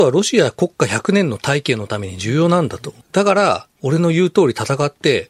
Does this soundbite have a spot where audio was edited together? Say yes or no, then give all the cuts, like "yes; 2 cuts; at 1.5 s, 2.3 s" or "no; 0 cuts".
yes; 1 cut; at 3.0 s